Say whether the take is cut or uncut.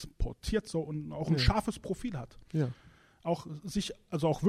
uncut